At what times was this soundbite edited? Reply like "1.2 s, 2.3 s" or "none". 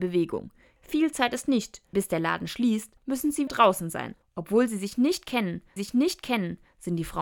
1.9 s, 3.0 s, 3.5 s, 4.2 s, 5.8 s